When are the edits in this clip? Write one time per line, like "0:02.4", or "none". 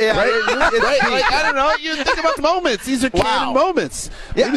0:02.4

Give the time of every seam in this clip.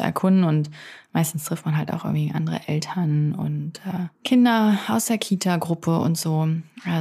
0:04.1

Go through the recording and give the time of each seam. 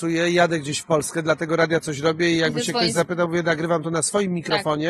none

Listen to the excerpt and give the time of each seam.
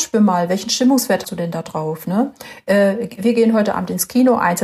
0:01.2

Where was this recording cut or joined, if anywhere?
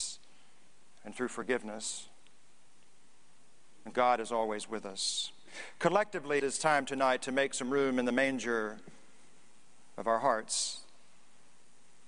0:03.9
0:06.4

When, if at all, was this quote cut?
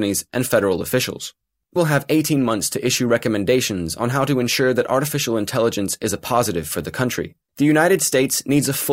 0:01.8

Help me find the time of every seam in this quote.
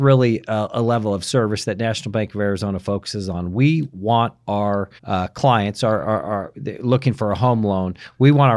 0:05.0

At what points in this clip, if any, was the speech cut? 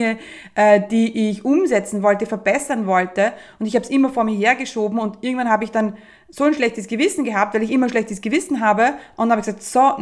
none

